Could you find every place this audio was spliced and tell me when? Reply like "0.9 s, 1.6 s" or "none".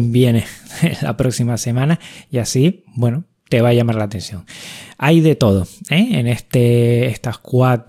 none